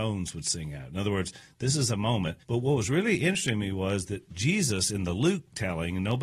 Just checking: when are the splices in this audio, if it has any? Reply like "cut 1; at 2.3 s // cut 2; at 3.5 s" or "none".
cut 1; at 2.4 s

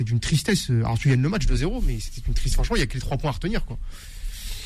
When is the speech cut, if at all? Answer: none

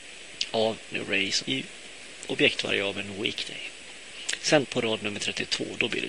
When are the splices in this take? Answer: cut 1; at 0.9 s // cut 2; at 1.4 s // cut 3; at 4.6 s

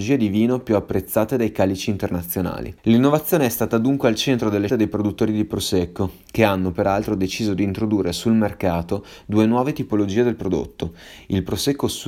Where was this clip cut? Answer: cut 1; at 4.7 s

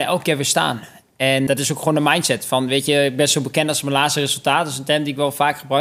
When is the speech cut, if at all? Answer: cut 1; at 1.5 s

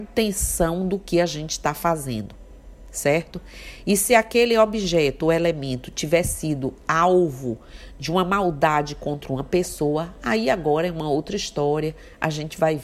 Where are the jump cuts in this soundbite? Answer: none

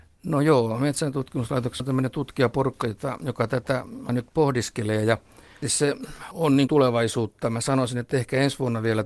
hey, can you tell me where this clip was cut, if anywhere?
cut 1; at 1.8 s // cut 2; at 4.1 s // cut 3; at 5.6 s // cut 4; at 6.3 s // cut 5; at 6.7 s

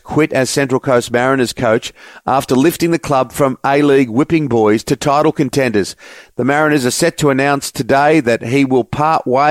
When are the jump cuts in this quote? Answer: none

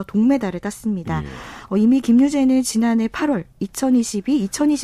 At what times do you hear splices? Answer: none

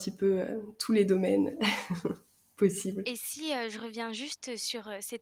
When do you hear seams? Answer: none

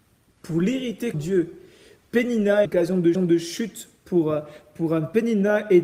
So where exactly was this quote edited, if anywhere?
cut 1; at 1.1 s // cut 2; at 2.6 s // cut 3; at 3.1 s

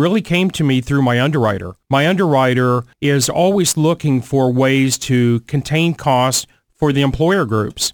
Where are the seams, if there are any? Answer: cut 1; at 1.8 s // cut 2; at 2.9 s

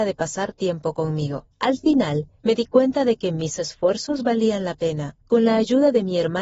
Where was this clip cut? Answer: cut 1; at 1.5 s // cut 2; at 2.4 s // cut 3; at 5.2 s

